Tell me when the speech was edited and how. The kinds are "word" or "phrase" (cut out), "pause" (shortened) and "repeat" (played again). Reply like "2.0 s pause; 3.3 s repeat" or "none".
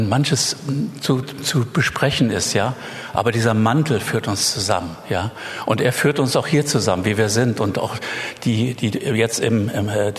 1.2 s word